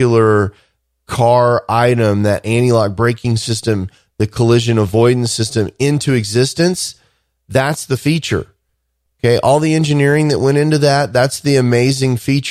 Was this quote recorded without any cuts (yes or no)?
yes